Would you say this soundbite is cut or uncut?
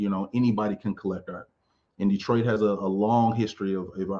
uncut